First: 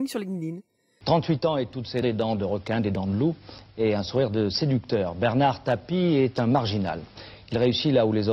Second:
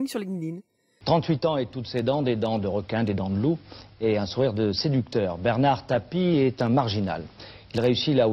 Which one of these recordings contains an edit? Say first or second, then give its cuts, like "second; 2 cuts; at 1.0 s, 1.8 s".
first; 1 cut; at 2.0 s